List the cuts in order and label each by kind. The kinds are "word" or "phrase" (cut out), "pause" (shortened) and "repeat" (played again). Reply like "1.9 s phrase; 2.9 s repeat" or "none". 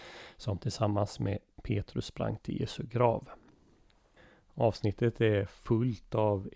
4.2 s pause